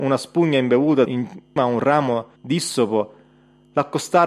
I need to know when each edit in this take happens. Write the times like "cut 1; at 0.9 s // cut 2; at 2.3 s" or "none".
cut 1; at 1.1 s // cut 2; at 1.6 s // cut 3; at 2.4 s